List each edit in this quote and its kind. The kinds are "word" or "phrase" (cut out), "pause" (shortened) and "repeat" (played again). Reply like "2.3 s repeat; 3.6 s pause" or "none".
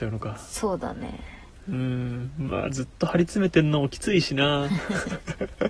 none